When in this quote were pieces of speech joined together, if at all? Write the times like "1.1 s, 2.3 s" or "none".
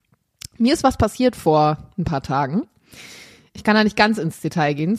none